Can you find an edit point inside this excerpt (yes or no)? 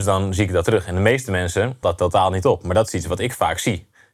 yes